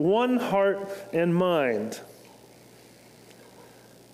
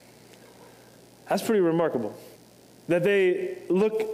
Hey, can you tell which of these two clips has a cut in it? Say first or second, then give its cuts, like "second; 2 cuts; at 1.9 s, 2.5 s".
second; 1 cut; at 2.4 s